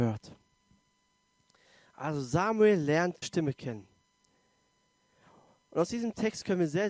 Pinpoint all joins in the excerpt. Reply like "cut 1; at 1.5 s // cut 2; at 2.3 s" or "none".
cut 1; at 3.2 s